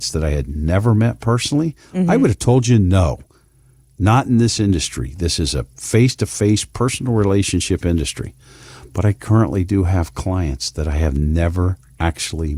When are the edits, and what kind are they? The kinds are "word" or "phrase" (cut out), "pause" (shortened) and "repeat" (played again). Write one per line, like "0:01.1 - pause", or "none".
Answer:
none